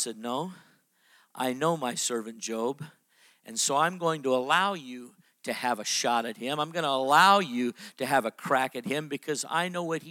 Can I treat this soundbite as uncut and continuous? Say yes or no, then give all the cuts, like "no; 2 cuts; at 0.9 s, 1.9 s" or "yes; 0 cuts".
yes; 0 cuts